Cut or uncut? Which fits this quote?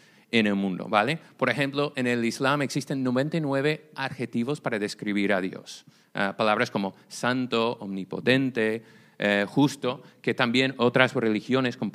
uncut